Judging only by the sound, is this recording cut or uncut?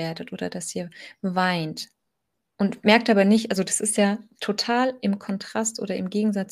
uncut